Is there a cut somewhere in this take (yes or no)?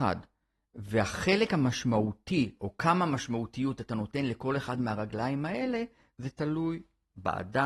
no